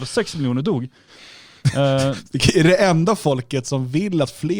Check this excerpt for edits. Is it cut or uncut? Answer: uncut